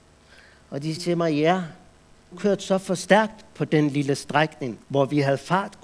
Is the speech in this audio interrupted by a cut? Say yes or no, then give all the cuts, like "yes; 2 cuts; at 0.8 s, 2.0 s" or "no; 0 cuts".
yes; 3 cuts; at 1.0 s, 2.3 s, 4.8 s